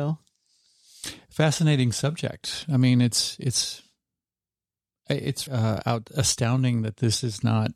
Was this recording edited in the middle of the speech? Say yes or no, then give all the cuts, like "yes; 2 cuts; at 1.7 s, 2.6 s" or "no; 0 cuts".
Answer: yes; 1 cut; at 5.5 s